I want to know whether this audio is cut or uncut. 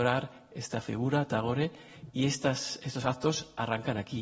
uncut